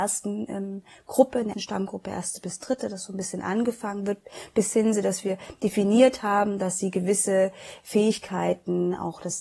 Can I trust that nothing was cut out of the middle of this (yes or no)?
no